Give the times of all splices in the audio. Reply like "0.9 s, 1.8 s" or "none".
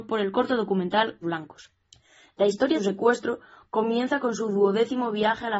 1.2 s, 1.9 s, 2.7 s

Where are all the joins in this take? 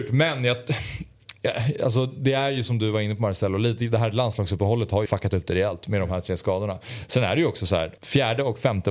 5.1 s, 8.0 s

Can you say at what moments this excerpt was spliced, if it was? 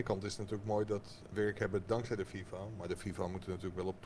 1.3 s

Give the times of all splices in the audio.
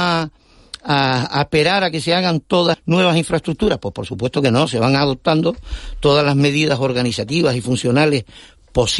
2.7 s

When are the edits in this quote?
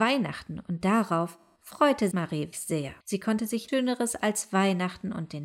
2.1 s, 2.5 s, 3.0 s, 3.7 s

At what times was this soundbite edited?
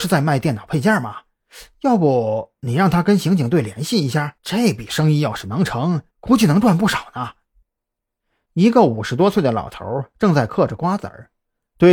4.4 s, 6.1 s

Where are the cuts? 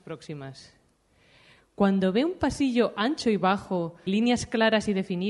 4.1 s

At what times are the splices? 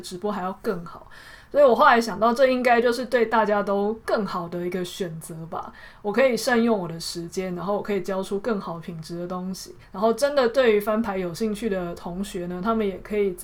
9.8 s

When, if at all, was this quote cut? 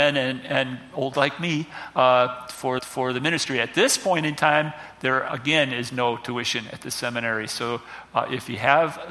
1.1 s, 2.8 s

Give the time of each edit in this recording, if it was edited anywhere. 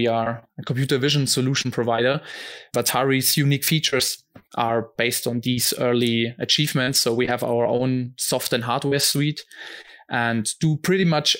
none

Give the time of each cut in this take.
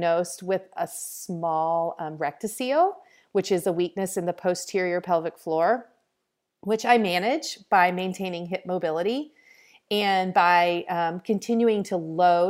none

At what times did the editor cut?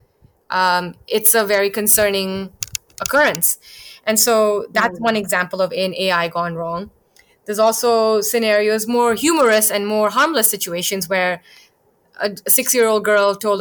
none

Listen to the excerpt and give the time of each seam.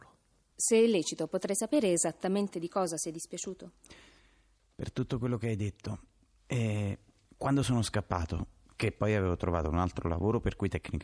none

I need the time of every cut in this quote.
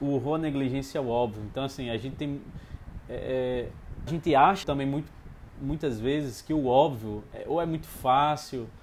4.1 s, 4.6 s

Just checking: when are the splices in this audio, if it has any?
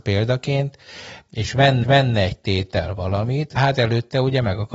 1.8 s, 3.6 s

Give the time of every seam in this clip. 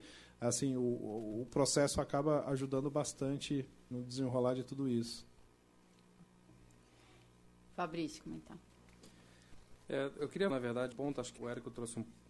1.9 s, 3.9 s, 8.2 s, 10.2 s, 10.5 s, 10.9 s, 11.4 s

